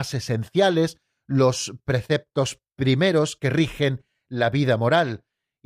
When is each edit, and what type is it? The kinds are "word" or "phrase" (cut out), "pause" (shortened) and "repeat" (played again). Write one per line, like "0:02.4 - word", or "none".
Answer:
none